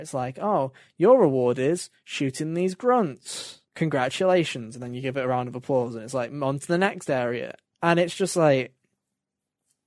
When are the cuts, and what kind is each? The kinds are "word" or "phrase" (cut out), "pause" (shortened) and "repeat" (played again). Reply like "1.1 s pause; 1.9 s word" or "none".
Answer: 3.7 s pause; 7.7 s pause